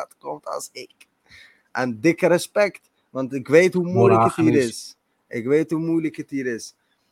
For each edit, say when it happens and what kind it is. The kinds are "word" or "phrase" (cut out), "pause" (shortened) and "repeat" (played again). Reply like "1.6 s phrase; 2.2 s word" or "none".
none